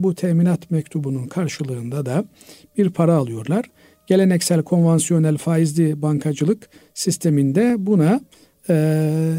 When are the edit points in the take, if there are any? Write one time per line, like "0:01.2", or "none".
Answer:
none